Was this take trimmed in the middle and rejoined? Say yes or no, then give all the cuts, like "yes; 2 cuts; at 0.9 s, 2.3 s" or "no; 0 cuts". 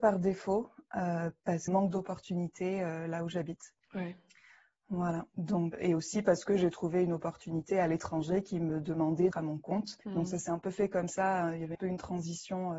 yes; 6 cuts; at 1.7 s, 3.8 s, 5.7 s, 9.3 s, 10.0 s, 11.7 s